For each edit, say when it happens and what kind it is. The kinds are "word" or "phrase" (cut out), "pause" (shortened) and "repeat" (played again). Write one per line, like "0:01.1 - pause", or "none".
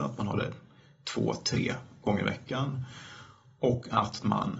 none